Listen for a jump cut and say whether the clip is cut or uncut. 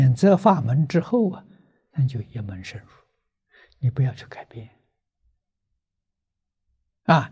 uncut